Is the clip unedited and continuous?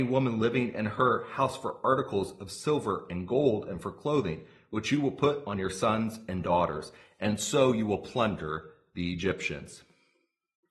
yes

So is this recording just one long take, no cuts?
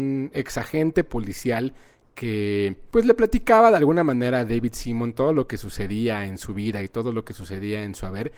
yes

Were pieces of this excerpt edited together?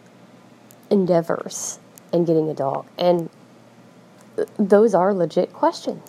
no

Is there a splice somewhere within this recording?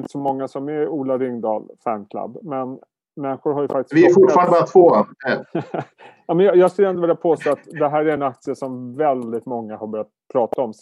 no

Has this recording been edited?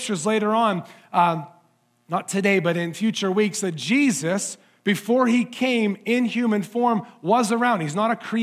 no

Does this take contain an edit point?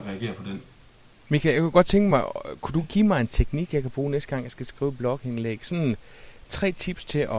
no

